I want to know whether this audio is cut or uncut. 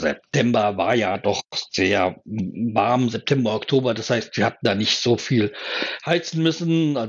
uncut